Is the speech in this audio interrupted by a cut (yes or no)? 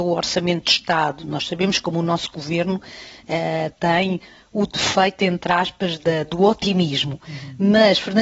no